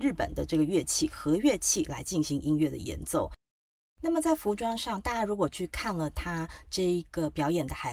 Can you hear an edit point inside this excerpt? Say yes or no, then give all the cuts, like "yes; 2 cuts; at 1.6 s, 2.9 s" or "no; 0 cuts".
no; 0 cuts